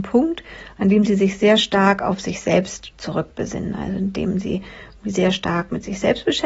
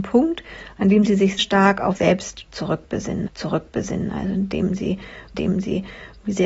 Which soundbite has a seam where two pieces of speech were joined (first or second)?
second